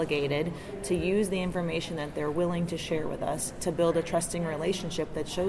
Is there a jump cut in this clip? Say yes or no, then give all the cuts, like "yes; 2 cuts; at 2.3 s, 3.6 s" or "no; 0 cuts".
no; 0 cuts